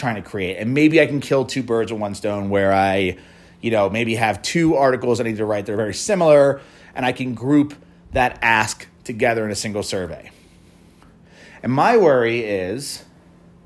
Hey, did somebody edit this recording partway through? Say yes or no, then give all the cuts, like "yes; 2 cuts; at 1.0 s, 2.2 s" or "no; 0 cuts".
no; 0 cuts